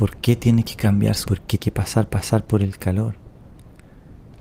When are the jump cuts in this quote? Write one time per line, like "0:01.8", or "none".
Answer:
0:01.2
0:01.6
0:02.1